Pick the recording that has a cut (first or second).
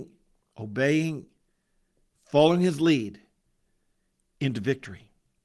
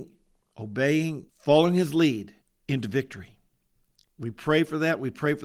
second